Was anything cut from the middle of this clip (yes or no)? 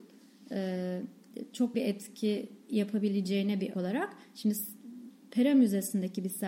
yes